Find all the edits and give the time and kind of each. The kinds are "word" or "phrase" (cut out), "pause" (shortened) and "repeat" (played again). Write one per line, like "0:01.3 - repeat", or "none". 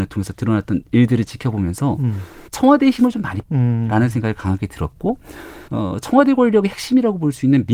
0:02.5 - pause
0:03.4 - word
0:05.7 - pause